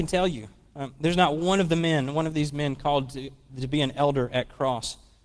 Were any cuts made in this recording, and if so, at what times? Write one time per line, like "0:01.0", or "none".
none